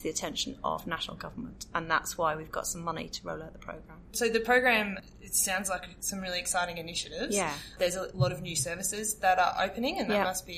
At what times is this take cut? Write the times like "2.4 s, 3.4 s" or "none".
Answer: none

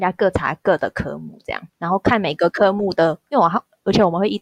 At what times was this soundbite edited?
1.7 s

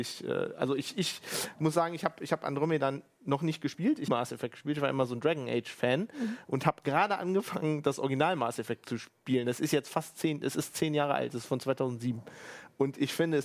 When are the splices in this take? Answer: 4.1 s

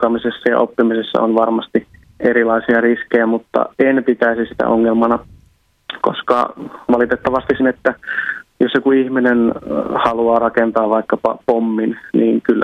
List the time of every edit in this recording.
2.0 s, 3.7 s, 7.6 s

